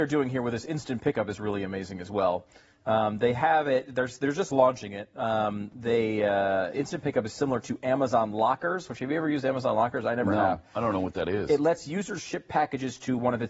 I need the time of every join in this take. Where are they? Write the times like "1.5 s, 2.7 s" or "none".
none